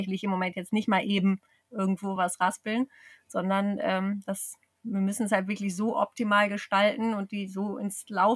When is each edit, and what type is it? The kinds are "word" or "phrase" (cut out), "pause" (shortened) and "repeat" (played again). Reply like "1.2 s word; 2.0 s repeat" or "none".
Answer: none